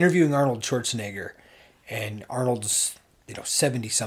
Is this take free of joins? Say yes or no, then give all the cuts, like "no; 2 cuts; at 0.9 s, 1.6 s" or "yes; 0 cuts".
yes; 0 cuts